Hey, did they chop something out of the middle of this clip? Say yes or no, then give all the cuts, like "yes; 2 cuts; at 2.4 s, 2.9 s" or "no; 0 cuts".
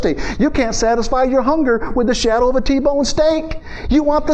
no; 0 cuts